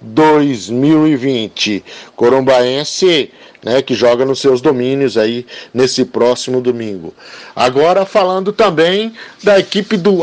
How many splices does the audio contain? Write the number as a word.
zero